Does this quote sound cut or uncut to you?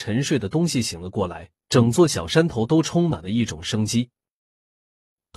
cut